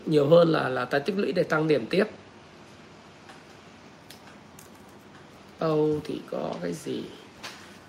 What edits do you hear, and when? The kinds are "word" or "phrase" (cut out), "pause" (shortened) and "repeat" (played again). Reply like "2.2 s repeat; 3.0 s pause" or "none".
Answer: none